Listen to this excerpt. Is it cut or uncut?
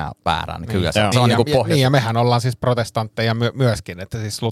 cut